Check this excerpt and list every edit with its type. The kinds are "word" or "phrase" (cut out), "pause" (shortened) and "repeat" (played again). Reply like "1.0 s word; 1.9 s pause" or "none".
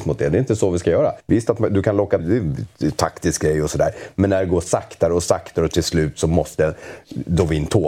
1.2 s pause; 2.2 s phrase